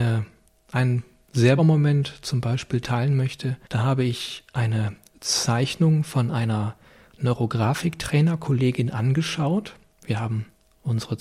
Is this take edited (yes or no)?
yes